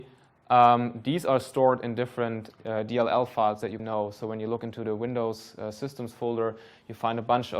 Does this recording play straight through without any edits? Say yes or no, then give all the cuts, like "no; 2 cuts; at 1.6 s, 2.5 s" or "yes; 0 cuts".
no; 2 cuts; at 2.5 s, 3.8 s